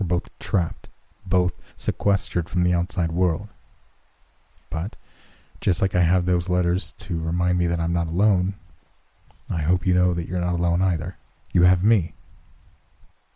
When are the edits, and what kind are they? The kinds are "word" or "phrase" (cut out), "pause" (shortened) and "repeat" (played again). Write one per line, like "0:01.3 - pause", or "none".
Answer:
0:01.7 - pause
0:11.4 - pause